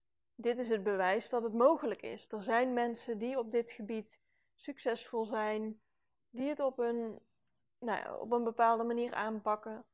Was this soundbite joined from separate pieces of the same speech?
no; 0 cuts

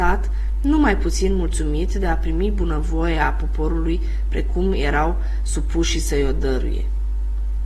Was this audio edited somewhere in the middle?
no; 0 cuts

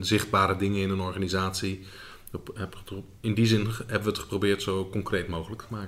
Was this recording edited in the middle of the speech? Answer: no; 0 cuts

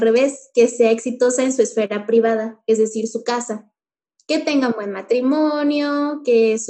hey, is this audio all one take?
yes; 0 cuts

